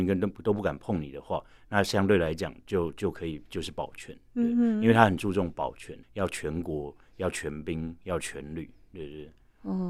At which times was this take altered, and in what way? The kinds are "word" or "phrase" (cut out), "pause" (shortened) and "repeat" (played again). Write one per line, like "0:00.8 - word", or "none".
0:06.0 - pause